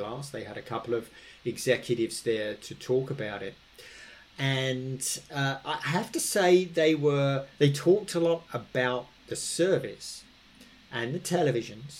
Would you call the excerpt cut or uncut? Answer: uncut